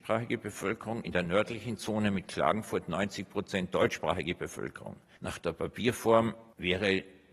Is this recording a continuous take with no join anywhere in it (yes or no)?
yes